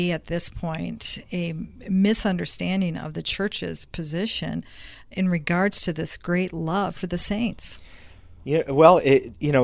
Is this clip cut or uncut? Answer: uncut